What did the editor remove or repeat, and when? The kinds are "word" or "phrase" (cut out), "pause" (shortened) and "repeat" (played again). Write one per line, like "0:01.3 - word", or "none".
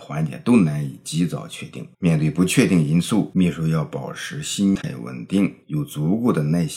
0:01.9 - pause
0:05.6 - pause

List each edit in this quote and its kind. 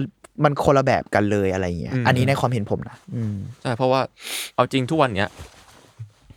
0:03.0 - pause

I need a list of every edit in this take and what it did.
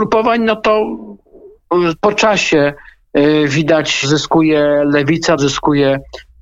0:02.0 - word
0:04.0 - word
0:05.4 - word

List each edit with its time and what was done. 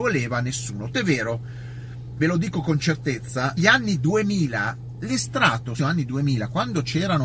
0:00.9 - word
0:02.2 - word
0:03.6 - word
0:05.8 - word

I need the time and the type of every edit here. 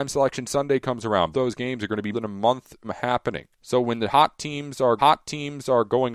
0:01.3 - word
0:02.1 - word
0:02.8 - word
0:03.5 - pause
0:05.0 - repeat

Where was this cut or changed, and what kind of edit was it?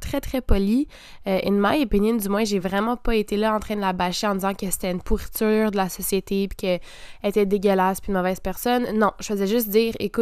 none

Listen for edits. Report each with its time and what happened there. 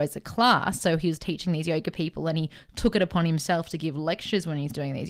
none

